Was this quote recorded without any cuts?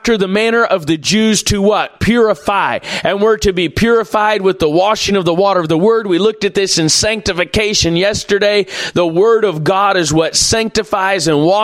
yes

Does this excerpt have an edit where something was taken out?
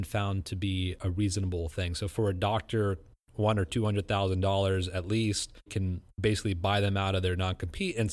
no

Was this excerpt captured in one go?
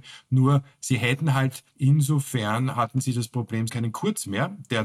no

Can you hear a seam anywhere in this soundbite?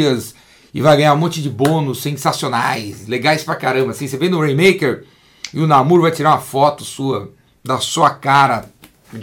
yes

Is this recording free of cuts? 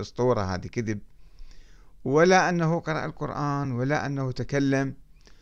yes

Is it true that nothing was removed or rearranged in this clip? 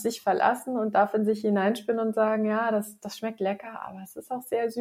yes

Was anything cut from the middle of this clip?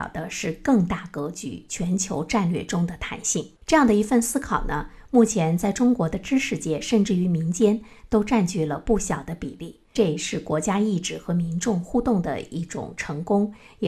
yes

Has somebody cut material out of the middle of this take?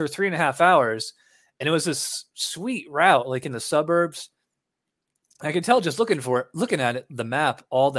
no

